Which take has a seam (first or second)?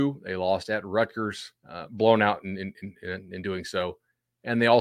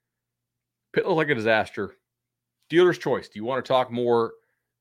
first